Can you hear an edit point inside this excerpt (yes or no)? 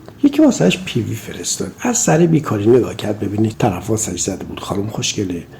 yes